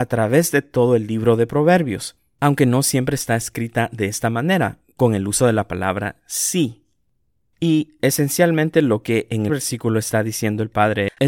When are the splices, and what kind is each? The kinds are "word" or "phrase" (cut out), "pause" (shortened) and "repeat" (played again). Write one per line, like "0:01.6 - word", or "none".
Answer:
0:09.5 - phrase